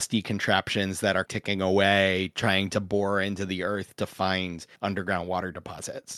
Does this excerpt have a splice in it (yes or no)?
yes